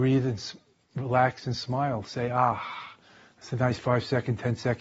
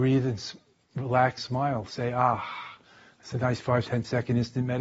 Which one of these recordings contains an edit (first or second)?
second